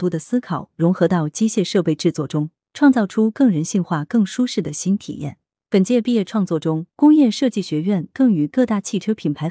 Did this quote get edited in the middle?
no; 0 cuts

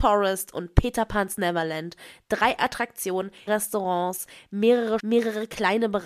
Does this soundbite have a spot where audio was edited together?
yes; 2 cuts; at 3.5 s, 5.0 s

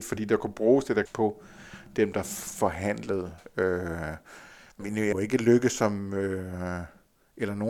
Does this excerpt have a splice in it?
yes; 3 cuts; at 1.1 s, 4.8 s, 5.1 s

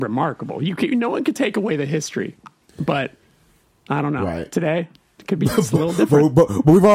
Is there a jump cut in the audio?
no; 0 cuts

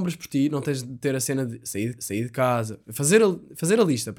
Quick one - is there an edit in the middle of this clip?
yes; 1 cut; at 2.0 s

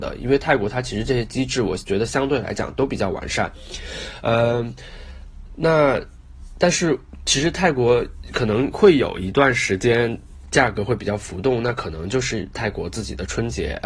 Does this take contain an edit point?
yes; 1 cut; at 10.4 s

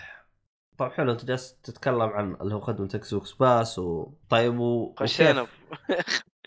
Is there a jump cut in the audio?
yes; 1 cut; at 4.2 s

